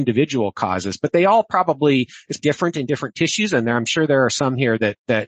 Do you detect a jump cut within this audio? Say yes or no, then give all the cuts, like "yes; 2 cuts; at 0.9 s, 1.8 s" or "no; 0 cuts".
yes; 1 cut; at 2.4 s